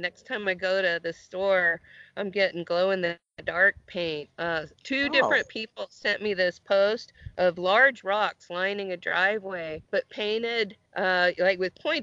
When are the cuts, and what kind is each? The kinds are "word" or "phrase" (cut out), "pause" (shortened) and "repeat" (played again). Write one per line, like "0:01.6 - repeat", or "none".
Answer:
0:04.7 - pause
0:09.8 - pause
0:10.9 - pause